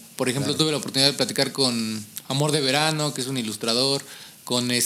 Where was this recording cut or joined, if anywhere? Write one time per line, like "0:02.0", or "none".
none